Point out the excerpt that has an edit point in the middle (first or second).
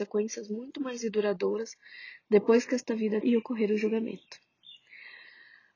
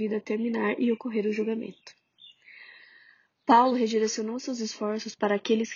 first